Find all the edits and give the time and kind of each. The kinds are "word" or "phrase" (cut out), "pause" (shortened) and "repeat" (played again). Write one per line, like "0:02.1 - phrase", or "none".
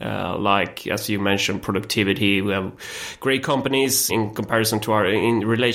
0:04.1 - word